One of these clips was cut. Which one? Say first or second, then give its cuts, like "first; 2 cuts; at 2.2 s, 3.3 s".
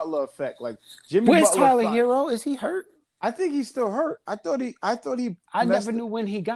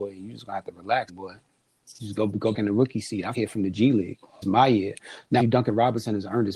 second; 5 cuts; at 1.1 s, 2.5 s, 3.3 s, 4.4 s, 5.4 s